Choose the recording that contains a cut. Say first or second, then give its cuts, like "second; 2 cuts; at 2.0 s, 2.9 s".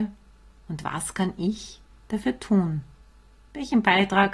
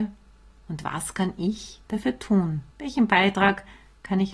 second; 2 cuts; at 1.8 s, 2.7 s